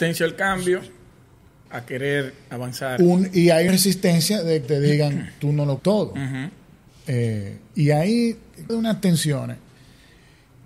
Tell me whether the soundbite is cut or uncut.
cut